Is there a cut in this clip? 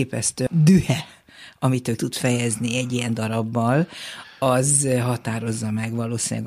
yes; 1 cut; at 2.0 s

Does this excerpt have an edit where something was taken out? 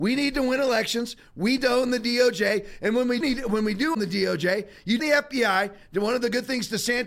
yes; 4 cuts; at 1.6 s, 3.2 s, 3.9 s, 5.0 s

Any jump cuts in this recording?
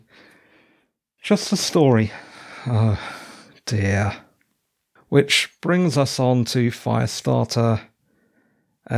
no; 0 cuts

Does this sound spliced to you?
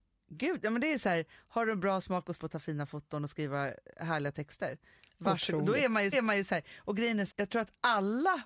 yes; 3 cuts; at 2.4 s, 6.1 s, 7.3 s

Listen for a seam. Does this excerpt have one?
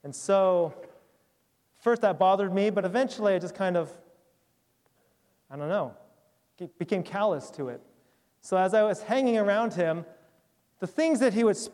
no; 0 cuts

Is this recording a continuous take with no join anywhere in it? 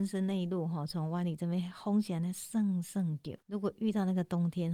no; 1 cut; at 3.4 s

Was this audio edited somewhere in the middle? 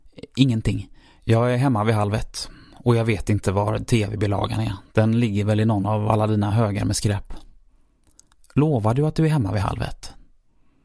no; 0 cuts

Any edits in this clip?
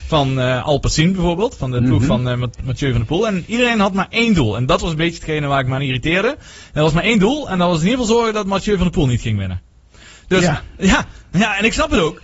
no; 0 cuts

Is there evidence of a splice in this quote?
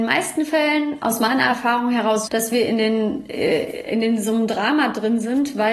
yes; 1 cut; at 2.3 s

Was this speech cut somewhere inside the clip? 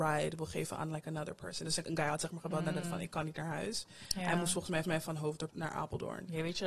yes; 4 cuts; at 1.8 s, 2.8 s, 4.8 s, 5.5 s

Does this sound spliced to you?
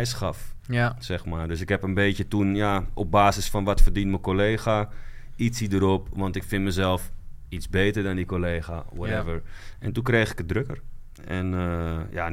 no; 0 cuts

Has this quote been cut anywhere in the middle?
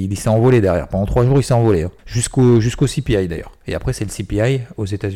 yes; 1 cut; at 2.0 s

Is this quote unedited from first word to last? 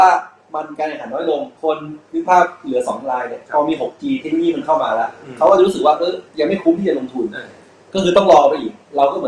no; 3 cuts; at 1.6 s, 3.4 s, 6.3 s

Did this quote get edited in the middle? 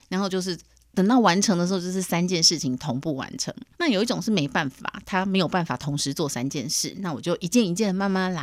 yes; 1 cut; at 3.7 s

